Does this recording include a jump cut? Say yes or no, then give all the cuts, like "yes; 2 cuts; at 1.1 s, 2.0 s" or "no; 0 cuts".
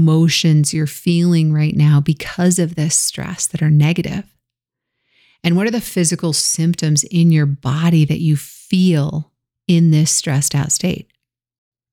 no; 0 cuts